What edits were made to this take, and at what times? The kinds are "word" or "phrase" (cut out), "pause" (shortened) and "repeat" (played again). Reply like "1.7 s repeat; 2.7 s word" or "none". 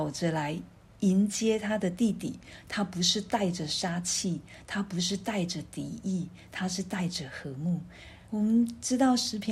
8.2 s pause